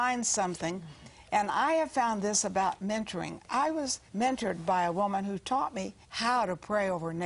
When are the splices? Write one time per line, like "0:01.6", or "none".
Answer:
0:04.1
0:06.0